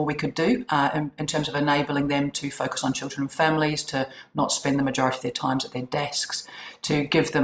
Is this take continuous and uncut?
yes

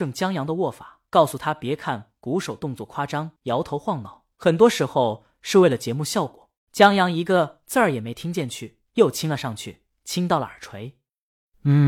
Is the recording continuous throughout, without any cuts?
no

